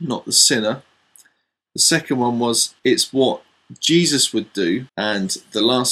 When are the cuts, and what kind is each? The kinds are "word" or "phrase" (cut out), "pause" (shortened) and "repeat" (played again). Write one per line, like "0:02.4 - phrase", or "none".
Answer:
0:02.8 - pause
0:04.9 - pause